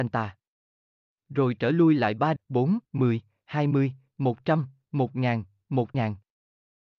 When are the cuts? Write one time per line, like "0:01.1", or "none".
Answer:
0:02.4
0:02.8
0:05.9